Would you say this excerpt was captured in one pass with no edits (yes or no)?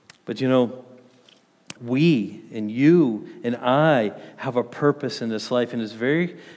no